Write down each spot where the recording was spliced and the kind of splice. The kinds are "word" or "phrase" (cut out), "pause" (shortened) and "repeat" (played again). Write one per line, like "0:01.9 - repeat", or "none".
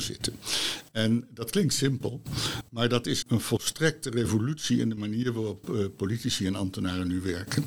0:03.2 - word

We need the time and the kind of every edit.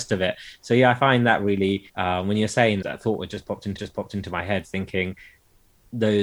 0:01.9 - pause
0:02.8 - word
0:03.8 - repeat

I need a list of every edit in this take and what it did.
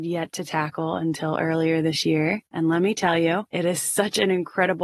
none

